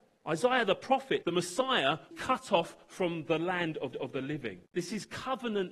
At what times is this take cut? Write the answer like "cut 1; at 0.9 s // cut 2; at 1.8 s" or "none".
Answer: cut 1; at 1.2 s // cut 2; at 2.1 s // cut 3; at 3.9 s // cut 4; at 4.7 s